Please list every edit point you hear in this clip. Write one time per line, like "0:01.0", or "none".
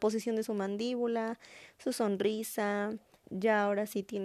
0:03.2